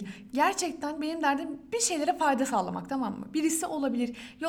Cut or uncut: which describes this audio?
uncut